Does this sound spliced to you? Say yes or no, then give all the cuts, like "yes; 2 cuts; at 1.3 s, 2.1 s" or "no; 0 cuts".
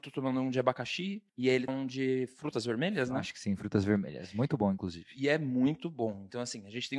yes; 2 cuts; at 1.3 s, 1.7 s